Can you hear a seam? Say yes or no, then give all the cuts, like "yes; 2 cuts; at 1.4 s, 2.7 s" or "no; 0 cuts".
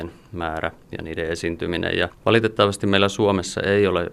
no; 0 cuts